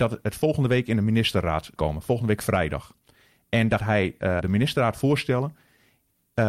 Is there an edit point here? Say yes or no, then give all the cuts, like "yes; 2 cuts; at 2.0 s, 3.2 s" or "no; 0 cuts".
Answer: yes; 3 cuts; at 1.8 s, 3.8 s, 4.4 s